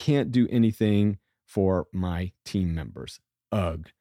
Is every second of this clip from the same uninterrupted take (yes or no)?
yes